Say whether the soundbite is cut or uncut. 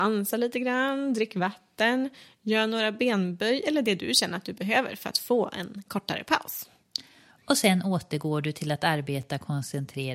uncut